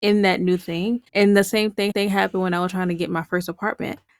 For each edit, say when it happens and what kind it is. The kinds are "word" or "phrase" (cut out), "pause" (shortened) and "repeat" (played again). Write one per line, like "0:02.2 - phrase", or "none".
0:01.1 - pause
0:01.9 - repeat